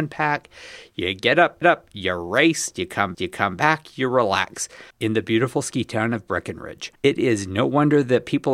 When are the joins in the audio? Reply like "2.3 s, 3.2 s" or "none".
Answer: 1.6 s, 3.1 s, 4.9 s, 7.0 s